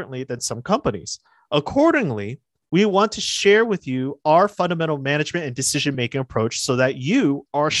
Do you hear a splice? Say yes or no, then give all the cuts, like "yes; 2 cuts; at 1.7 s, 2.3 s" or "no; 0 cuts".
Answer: no; 0 cuts